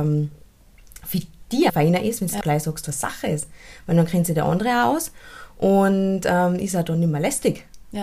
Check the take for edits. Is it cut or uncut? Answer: cut